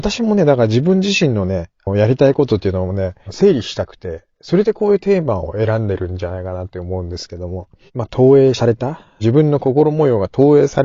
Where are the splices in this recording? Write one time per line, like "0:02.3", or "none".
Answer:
none

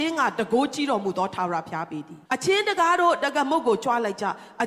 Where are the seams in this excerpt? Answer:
0:02.3

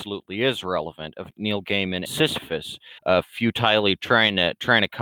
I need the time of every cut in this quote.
0:01.3
0:02.1
0:03.0

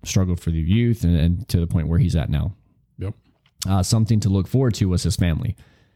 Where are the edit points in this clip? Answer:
none

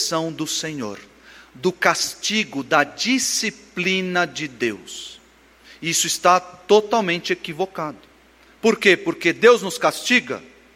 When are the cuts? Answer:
none

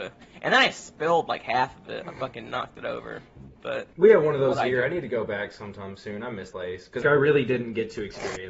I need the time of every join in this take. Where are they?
0:03.9
0:06.5
0:07.0

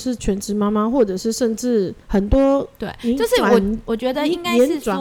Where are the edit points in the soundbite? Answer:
0:02.0

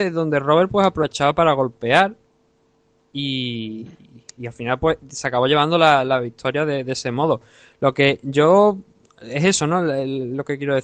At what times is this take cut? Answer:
none

